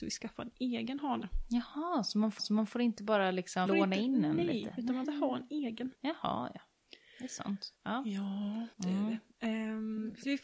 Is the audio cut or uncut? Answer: cut